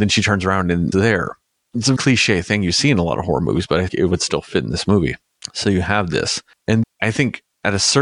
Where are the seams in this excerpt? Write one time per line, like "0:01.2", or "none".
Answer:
0:00.9
0:02.0
0:03.9
0:06.8